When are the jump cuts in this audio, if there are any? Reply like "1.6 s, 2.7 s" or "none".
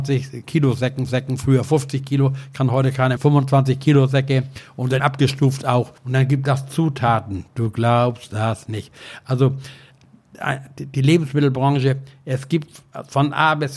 1.1 s, 3.2 s, 5.0 s, 6.0 s